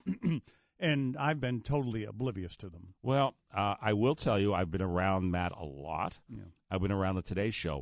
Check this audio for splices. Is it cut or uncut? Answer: uncut